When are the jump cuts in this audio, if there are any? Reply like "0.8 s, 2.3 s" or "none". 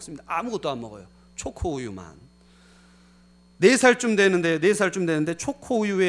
none